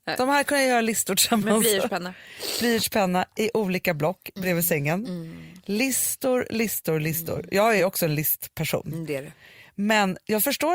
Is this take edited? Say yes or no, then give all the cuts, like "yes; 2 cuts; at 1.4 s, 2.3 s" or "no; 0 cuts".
no; 0 cuts